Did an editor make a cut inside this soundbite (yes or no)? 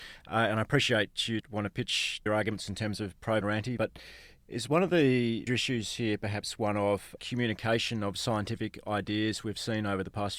yes